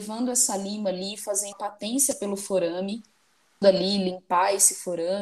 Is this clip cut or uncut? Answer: cut